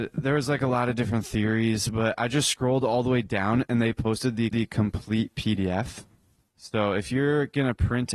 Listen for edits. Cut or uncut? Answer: cut